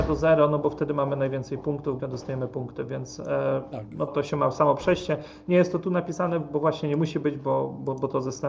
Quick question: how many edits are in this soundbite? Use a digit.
2